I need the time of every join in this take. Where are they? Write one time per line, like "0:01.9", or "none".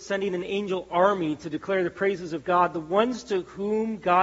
none